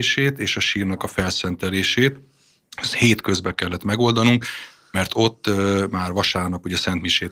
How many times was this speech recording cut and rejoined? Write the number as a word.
zero